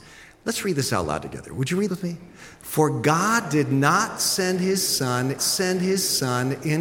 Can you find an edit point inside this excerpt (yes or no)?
yes